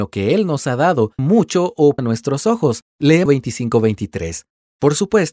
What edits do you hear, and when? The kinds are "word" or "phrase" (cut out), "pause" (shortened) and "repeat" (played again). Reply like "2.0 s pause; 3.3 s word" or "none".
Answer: 1.2 s word; 2.0 s word; 3.3 s word